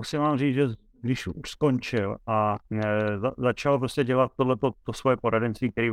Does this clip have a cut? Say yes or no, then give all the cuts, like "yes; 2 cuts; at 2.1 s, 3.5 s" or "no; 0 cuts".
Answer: yes; 1 cut; at 2.7 s